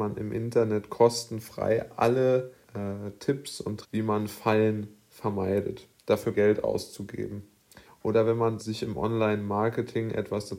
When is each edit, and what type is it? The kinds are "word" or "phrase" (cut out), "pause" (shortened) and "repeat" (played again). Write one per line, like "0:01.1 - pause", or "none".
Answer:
0:02.6 - pause
0:03.8 - word
0:06.3 - phrase
0:07.8 - pause
0:08.6 - word